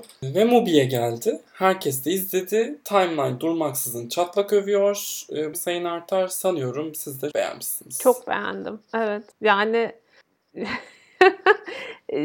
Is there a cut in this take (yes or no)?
yes